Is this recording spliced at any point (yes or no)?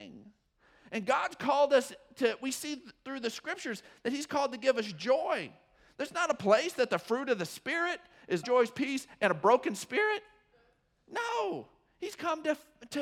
yes